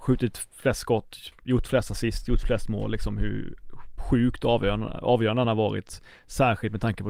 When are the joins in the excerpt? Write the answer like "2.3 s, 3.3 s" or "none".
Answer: none